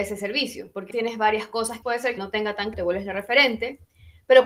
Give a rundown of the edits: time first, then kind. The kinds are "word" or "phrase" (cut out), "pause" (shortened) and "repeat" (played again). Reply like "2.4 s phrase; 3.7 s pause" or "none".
0.9 s word; 1.8 s phrase; 2.2 s phrase; 2.7 s word